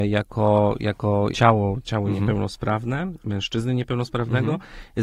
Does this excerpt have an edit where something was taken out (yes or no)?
yes